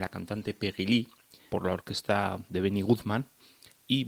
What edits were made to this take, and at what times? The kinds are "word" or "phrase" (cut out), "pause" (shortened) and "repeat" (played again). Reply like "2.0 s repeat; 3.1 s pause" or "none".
1.5 s word